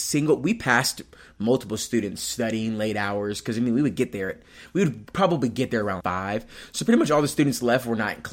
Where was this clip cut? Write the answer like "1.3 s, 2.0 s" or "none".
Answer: 6.0 s